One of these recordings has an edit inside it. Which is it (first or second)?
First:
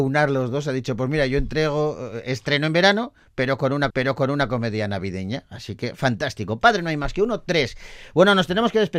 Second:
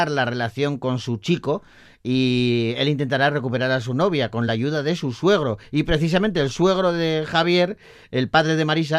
first